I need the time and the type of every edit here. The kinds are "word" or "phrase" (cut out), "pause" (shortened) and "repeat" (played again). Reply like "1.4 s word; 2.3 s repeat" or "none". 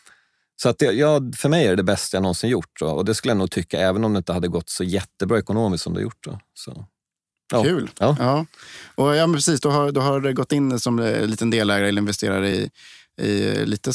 none